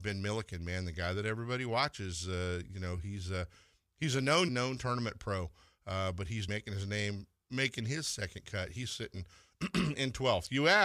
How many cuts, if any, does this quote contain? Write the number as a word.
two